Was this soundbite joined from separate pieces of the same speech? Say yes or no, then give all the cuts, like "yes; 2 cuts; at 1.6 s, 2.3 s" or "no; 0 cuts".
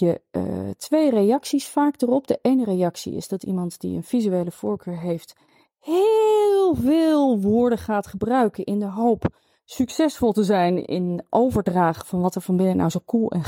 yes; 1 cut; at 10.8 s